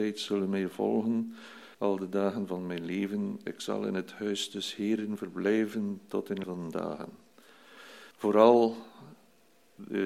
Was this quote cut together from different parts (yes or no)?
yes